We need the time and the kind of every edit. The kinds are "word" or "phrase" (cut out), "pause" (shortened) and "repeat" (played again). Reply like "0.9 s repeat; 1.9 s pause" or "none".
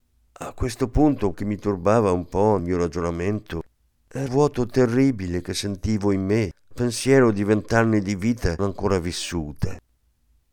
1.3 s word; 2.6 s word; 4.3 s word; 6.7 s word; 8.6 s word